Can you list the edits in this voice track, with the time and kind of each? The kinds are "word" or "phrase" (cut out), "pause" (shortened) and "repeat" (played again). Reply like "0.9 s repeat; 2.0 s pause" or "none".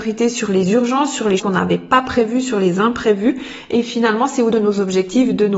1.4 s word; 4.5 s word